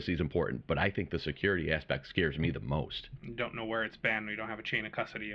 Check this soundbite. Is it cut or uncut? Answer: uncut